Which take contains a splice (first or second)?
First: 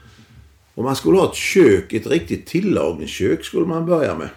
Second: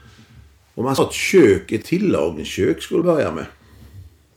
second